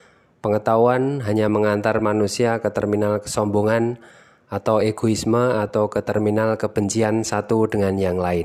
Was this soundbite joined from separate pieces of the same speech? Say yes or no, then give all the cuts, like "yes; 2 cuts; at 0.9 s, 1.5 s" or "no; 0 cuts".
no; 0 cuts